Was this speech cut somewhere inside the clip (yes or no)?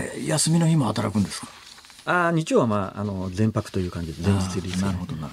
no